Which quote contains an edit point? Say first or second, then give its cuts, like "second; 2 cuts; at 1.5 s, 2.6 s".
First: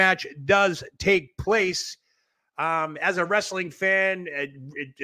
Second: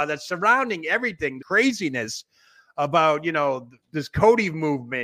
second; 2 cuts; at 1.4 s, 3.9 s